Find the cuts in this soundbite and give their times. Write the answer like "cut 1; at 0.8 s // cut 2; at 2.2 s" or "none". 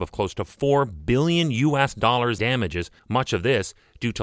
cut 1; at 2.4 s // cut 2; at 3.0 s